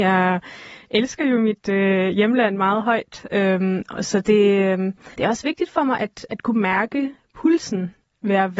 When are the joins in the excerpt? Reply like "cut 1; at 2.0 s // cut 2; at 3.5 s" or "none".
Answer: cut 1; at 5.1 s